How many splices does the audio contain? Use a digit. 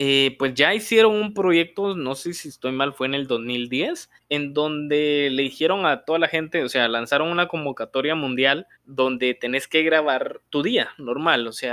3